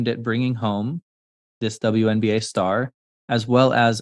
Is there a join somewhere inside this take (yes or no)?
no